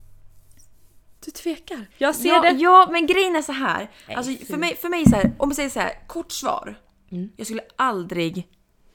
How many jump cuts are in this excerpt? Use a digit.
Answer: 2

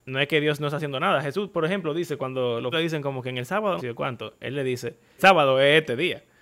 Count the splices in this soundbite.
3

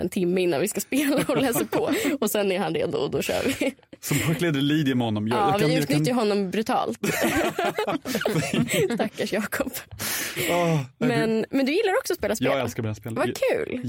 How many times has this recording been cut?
0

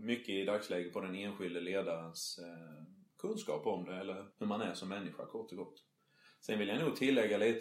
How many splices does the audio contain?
1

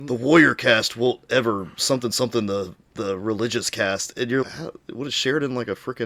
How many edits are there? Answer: 1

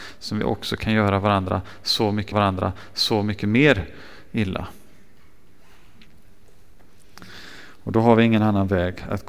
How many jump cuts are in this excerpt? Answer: 1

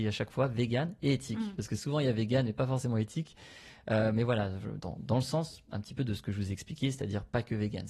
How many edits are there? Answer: 1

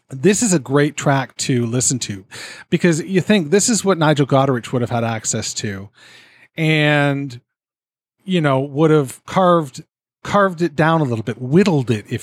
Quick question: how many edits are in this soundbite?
1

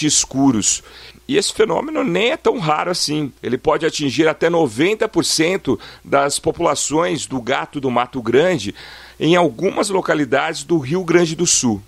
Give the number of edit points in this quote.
1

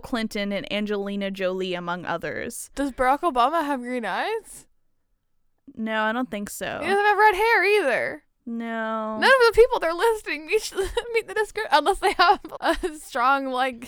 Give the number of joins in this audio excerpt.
1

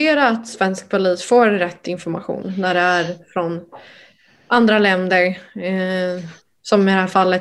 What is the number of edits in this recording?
0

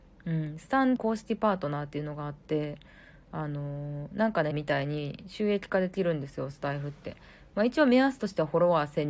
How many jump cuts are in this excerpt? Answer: 2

